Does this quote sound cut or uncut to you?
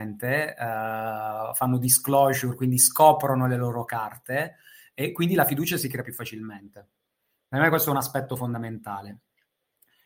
uncut